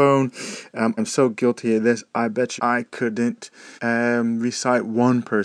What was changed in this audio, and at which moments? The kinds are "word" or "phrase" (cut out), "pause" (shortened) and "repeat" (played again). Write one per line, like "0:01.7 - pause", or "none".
0:01.0 - word
0:02.6 - word
0:03.8 - pause